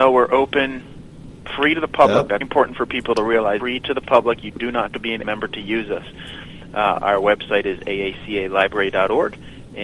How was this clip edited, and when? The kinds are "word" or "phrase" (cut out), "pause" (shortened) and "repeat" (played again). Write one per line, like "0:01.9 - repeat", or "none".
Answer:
0:02.4 - word
0:03.6 - phrase
0:04.9 - word
0:05.2 - word